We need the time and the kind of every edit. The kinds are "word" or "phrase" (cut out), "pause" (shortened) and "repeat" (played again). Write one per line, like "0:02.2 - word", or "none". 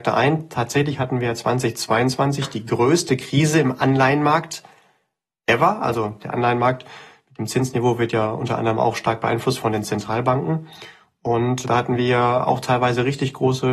none